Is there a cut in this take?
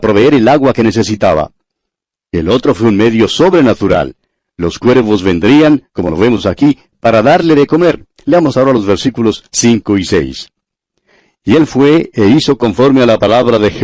no; 0 cuts

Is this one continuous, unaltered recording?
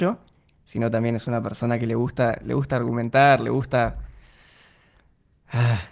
yes; 0 cuts

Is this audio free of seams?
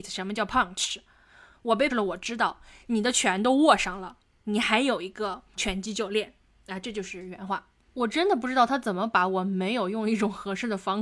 no; 2 cuts; at 1.9 s, 5.6 s

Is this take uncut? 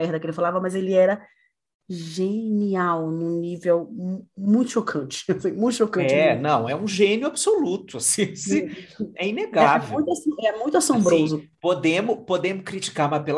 yes; 0 cuts

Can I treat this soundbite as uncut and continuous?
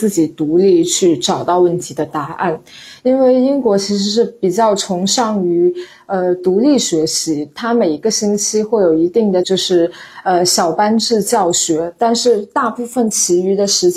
no; 1 cut; at 9.4 s

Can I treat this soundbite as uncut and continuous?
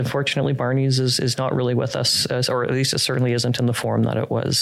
yes; 0 cuts

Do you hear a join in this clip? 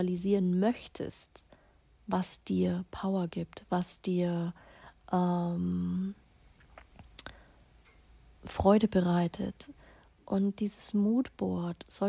no; 0 cuts

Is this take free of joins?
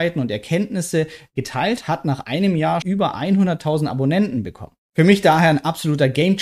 no; 2 cuts; at 1.8 s, 2.8 s

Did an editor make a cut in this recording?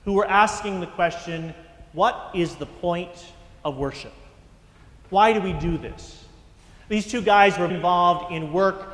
yes; 1 cut; at 7.7 s

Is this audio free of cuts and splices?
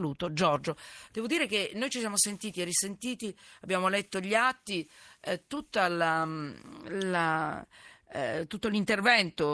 yes; 0 cuts

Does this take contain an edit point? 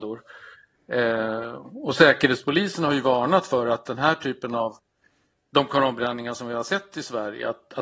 no; 0 cuts

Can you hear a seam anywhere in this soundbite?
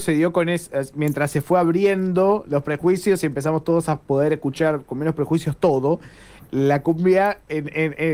no; 0 cuts

